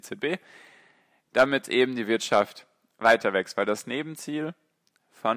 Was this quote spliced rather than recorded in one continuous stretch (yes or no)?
no